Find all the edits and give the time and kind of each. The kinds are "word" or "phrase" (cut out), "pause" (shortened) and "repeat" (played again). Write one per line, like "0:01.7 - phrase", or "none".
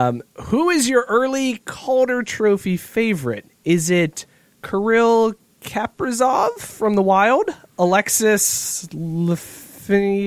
none